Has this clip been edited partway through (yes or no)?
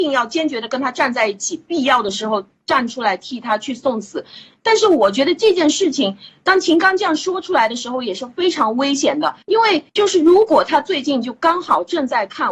yes